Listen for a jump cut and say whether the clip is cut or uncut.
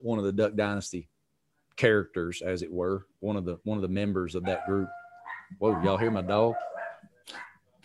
uncut